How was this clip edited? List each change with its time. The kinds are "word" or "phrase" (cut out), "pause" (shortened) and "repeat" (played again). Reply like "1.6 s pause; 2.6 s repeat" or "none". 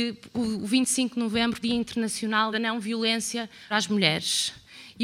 1.6 s phrase; 2.5 s word; 3.7 s word